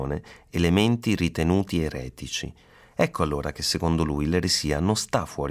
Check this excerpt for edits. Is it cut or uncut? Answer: uncut